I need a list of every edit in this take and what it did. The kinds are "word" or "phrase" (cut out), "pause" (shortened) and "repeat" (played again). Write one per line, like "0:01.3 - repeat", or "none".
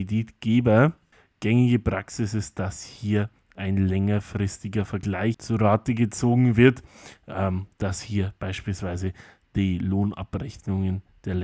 none